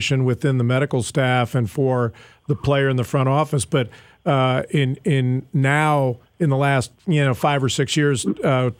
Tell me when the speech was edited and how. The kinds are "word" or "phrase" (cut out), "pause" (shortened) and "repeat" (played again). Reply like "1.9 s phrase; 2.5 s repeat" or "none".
none